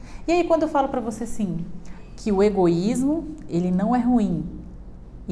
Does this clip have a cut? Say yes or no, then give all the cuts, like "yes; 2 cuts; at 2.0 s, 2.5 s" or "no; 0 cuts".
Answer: no; 0 cuts